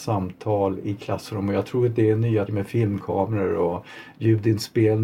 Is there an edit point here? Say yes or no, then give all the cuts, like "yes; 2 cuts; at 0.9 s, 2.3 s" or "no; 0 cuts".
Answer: yes; 1 cut; at 2.5 s